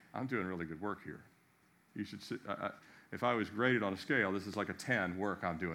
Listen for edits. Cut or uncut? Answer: uncut